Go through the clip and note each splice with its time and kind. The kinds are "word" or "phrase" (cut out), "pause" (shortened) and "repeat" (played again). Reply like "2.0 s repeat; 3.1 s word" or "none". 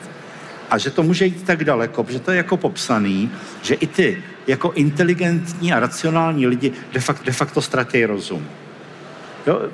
7.2 s repeat